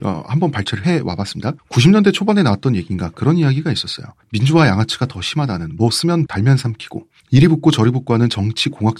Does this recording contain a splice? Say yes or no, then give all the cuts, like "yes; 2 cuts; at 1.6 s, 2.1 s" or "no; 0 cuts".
yes; 2 cuts; at 1.6 s, 6.3 s